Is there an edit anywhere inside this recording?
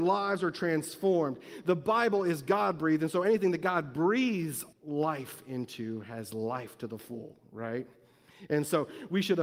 yes; 1 cut; at 4.7 s

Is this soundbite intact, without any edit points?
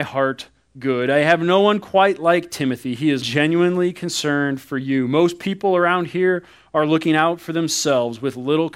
no; 1 cut; at 3.2 s

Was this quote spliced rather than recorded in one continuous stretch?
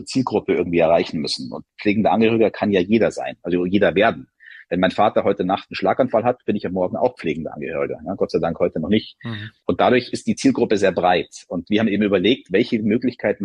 yes; 1 cut; at 9.6 s

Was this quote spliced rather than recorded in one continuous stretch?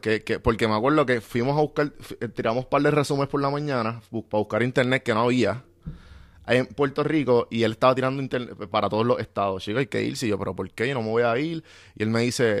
no; 0 cuts

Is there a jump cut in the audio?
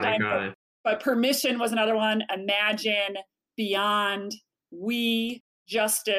no; 0 cuts

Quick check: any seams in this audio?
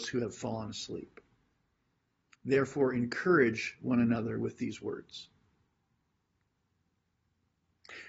no; 0 cuts

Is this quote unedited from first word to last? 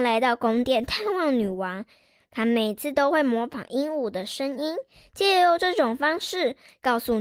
yes; 0 cuts

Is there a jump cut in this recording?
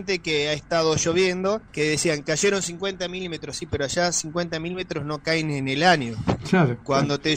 yes; 1 cut; at 1.7 s

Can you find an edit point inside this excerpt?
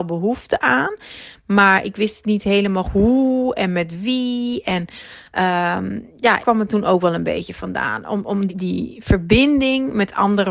yes; 3 cuts; at 2.8 s, 6.4 s, 8.5 s

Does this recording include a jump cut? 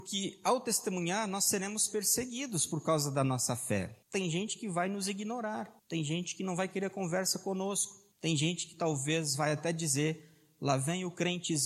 yes; 3 cuts; at 4.0 s, 5.8 s, 8.1 s

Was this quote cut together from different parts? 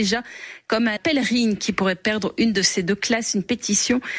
yes; 1 cut; at 1.0 s

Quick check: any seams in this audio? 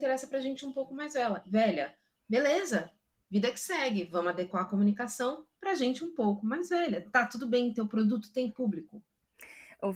no; 0 cuts

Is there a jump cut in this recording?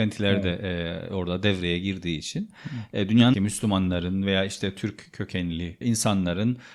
yes; 2 cuts; at 3.3 s, 5.8 s

